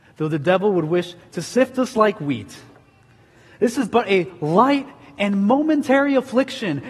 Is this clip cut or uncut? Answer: uncut